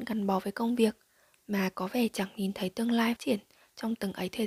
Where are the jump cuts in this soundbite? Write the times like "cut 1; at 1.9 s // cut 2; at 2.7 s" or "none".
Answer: cut 1; at 3.2 s